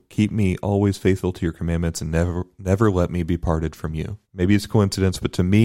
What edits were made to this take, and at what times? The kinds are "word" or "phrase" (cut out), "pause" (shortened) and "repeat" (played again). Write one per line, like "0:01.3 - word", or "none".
0:04.2 - pause